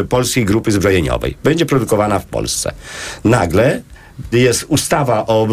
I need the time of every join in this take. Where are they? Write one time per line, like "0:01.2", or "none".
0:04.3